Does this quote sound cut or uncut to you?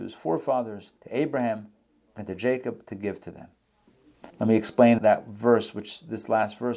cut